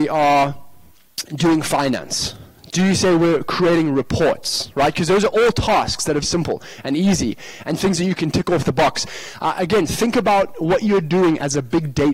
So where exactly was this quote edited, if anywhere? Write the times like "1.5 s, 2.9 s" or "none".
1.3 s, 6.2 s

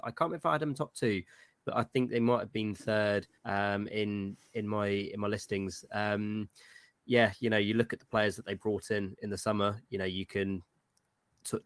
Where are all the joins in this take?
3.4 s

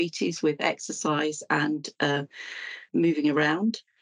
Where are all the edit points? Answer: 2.9 s

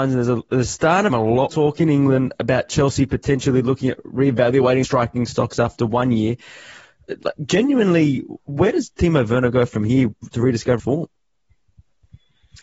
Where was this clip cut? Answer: 1.1 s, 1.5 s, 4.8 s, 8.5 s, 10.2 s, 10.8 s

